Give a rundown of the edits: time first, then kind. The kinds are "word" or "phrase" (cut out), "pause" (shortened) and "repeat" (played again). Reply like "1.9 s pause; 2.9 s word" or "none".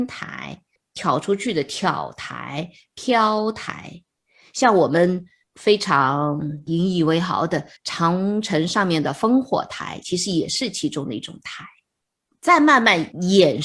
7.8 s pause